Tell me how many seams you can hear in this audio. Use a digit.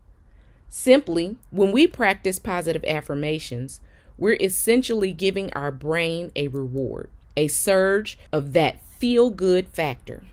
3